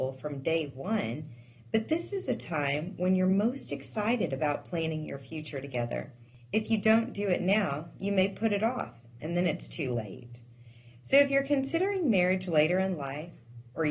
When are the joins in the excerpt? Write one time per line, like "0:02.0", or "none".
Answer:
none